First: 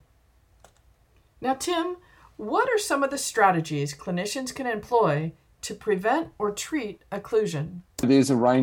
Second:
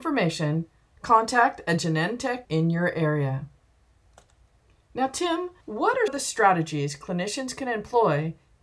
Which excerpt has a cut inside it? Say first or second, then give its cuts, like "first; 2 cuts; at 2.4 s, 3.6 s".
second; 3 cuts; at 2.4 s, 5.6 s, 6.1 s